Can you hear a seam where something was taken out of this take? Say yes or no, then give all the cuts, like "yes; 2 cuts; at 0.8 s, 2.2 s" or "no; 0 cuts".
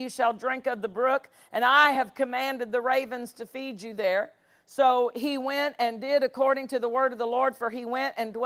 no; 0 cuts